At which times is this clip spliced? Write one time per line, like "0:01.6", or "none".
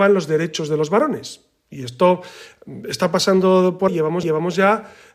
0:03.9
0:04.2